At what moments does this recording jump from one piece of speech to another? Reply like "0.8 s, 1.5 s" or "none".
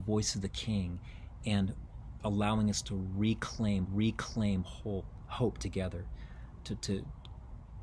2.2 s, 3.9 s